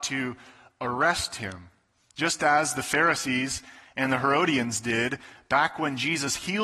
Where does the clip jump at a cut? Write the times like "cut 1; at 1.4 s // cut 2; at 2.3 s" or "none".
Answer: none

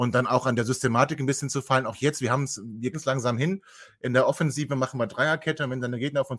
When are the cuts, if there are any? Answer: cut 1; at 2.9 s

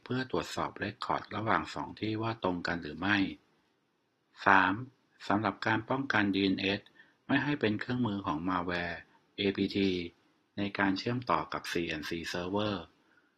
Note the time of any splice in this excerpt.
none

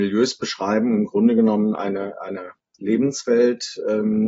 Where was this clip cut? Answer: none

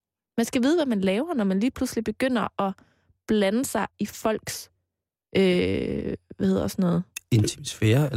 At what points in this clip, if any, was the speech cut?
none

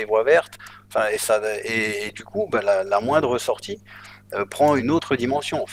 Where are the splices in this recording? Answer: cut 1; at 4.8 s

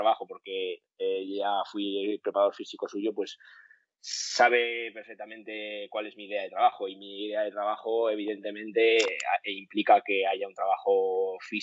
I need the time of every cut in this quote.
none

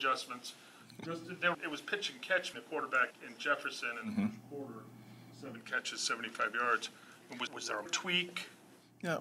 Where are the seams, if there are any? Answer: cut 1; at 1.5 s // cut 2; at 2.5 s // cut 3; at 3.1 s // cut 4; at 7.5 s // cut 5; at 7.9 s

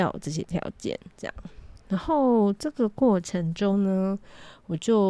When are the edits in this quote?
none

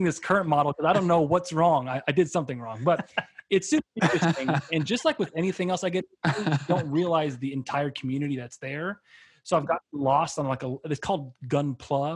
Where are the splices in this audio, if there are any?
none

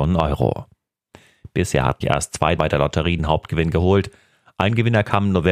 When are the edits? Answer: cut 1; at 2.0 s // cut 2; at 2.6 s // cut 3; at 3.2 s

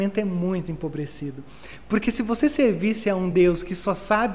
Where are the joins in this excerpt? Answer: none

